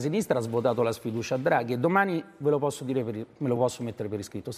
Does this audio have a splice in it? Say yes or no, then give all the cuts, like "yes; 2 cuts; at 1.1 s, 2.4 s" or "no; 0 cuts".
no; 0 cuts